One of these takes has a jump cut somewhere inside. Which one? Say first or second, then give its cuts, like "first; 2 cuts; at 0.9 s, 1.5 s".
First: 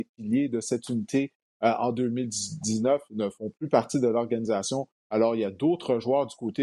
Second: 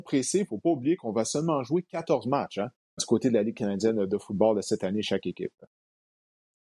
second; 1 cut; at 3.0 s